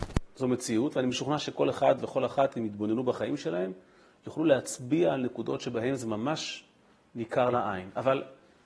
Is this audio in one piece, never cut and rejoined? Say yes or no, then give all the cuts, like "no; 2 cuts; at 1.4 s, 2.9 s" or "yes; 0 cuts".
yes; 0 cuts